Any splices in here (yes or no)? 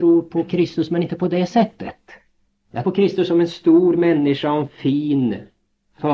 yes